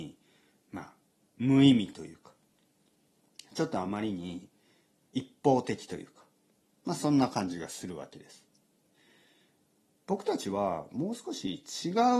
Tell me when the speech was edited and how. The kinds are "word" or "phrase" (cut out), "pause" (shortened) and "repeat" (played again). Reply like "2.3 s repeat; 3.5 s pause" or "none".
none